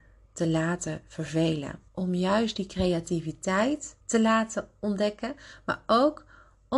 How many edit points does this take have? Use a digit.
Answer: 2